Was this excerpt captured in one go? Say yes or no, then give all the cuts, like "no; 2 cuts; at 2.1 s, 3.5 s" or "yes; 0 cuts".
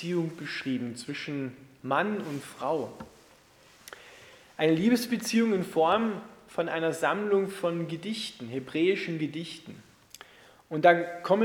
yes; 0 cuts